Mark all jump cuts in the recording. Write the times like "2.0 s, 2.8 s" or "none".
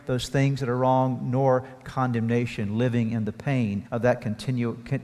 3.9 s